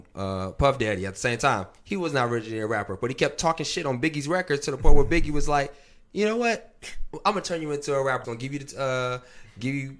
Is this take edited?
yes; 1 cut; at 8.2 s

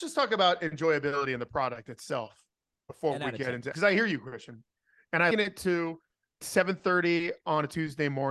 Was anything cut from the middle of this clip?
yes; 3 cuts; at 3.7 s, 5.3 s, 6.4 s

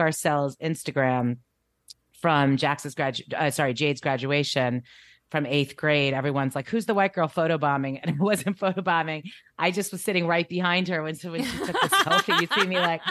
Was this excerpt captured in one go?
yes; 0 cuts

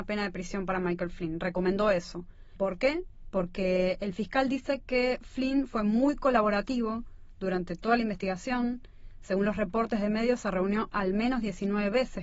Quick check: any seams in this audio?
no; 0 cuts

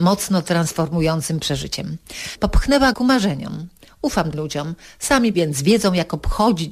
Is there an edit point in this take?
yes; 3 cuts; at 2.9 s, 4.3 s, 5.3 s

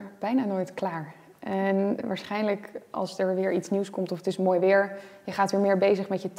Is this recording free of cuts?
yes; 0 cuts

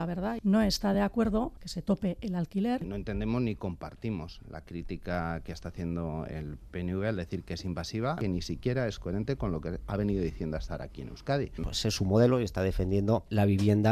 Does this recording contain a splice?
no; 0 cuts

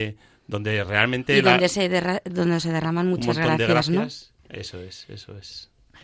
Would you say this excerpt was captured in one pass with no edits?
no; 1 cut; at 4.4 s

